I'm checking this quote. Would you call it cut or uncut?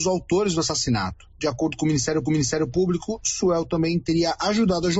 cut